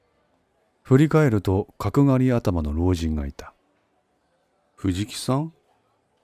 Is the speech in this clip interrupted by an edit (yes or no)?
no